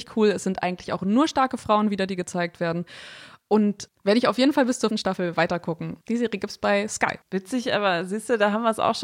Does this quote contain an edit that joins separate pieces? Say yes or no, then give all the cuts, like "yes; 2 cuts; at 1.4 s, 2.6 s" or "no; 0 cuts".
yes; 3 cuts; at 4.9 s, 6.0 s, 7.2 s